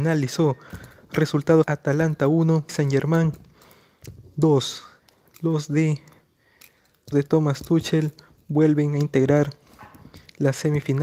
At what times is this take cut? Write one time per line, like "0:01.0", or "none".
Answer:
0:01.6
0:02.7
0:07.1